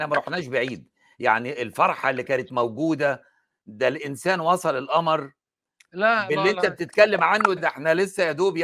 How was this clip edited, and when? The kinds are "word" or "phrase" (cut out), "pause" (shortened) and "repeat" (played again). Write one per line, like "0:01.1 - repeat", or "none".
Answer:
0:07.6 - word